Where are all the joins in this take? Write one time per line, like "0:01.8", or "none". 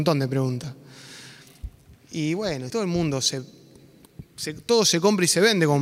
0:02.7